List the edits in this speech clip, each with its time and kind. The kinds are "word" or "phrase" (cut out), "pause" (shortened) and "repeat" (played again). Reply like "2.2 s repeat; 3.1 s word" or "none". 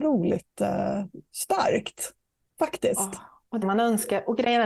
3.6 s phrase